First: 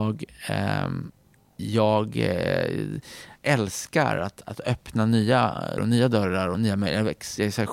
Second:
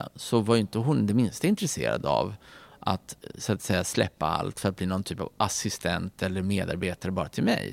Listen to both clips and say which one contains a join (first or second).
first